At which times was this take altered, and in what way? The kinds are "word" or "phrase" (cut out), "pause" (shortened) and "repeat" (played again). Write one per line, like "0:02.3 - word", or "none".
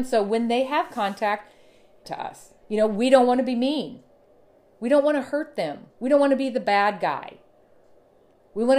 0:02.0 - phrase
0:02.6 - pause
0:05.9 - pause